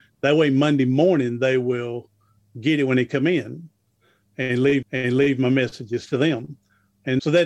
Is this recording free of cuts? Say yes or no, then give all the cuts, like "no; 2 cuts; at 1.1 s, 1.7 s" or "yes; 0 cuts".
no; 1 cut; at 4.8 s